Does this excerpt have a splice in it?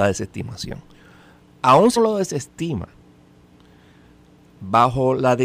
yes; 1 cut; at 2.0 s

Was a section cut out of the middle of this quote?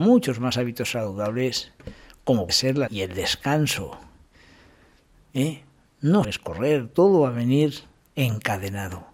yes; 3 cuts; at 2.5 s, 2.9 s, 6.2 s

